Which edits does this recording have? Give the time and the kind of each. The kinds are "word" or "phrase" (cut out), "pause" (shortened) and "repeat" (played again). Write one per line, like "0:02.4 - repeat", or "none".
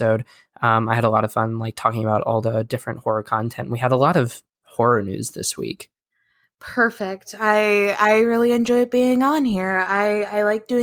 none